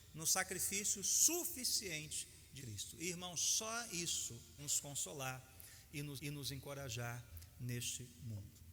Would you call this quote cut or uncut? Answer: cut